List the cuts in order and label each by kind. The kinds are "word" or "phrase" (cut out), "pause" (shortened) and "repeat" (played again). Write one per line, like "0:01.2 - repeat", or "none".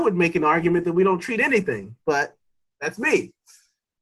none